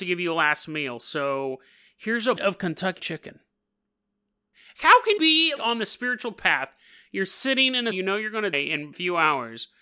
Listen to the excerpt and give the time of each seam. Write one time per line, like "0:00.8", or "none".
0:02.4
0:03.0
0:05.2
0:05.6
0:07.9
0:08.5